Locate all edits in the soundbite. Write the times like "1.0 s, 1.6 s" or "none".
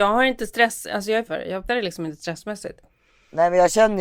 1.3 s, 1.7 s